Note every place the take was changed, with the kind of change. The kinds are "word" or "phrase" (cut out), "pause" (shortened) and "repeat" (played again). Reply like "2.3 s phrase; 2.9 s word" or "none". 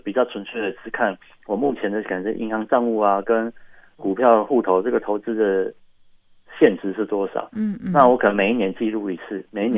none